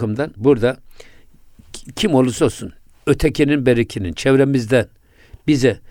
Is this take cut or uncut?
cut